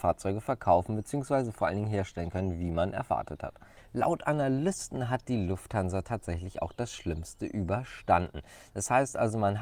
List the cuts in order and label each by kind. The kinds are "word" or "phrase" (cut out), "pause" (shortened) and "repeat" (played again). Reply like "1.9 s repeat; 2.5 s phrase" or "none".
none